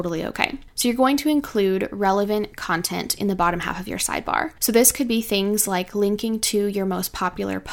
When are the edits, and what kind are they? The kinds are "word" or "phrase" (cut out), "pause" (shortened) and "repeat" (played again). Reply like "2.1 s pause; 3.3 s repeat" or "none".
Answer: none

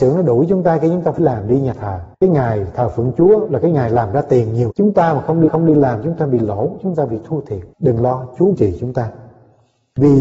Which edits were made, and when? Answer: 1.2 s word; 2.1 s pause; 4.7 s word; 5.5 s repeat; 7.7 s pause; 8.5 s phrase

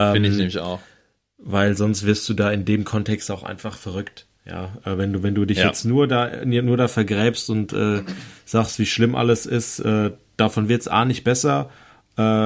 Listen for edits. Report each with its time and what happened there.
none

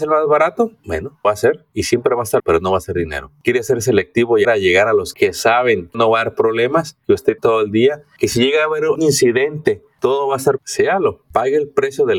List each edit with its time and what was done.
1.2 s word; 2.4 s word; 4.4 s word; 5.1 s word; 5.9 s word; 7.4 s word; 9.0 s word; 10.6 s word

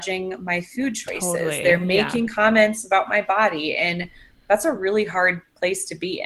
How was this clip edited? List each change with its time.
none

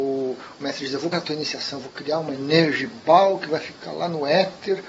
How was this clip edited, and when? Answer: 1.1 s word

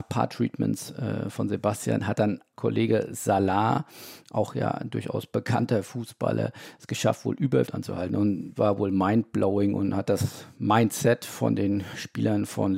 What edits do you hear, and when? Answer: 7.7 s phrase; 8.6 s word

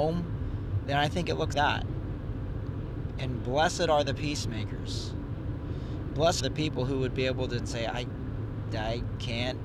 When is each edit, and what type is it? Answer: 1.5 s word; 6.4 s word; 7.6 s phrase

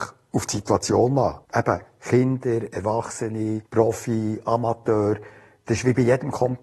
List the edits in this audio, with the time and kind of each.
1.4 s pause; 3.7 s pause

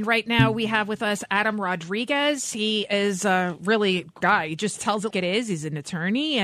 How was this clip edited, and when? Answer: 4.2 s word; 5.1 s word

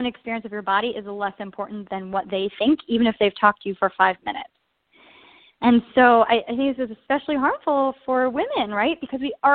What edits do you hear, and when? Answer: none

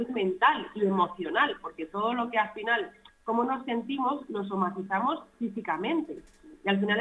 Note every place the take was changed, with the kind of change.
none

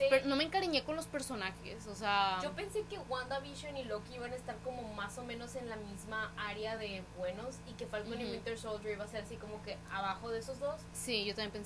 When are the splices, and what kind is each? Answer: none

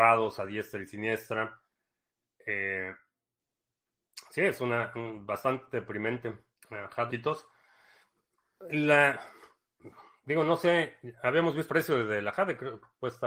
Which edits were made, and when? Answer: 7.1 s phrase; 11.7 s word

